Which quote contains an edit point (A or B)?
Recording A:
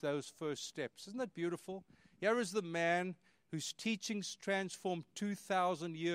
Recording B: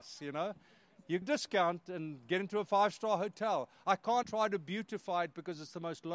B